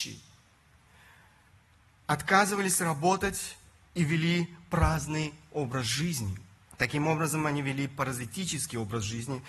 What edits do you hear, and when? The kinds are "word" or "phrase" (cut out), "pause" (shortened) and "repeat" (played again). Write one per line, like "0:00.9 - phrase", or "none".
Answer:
0:06.7 - pause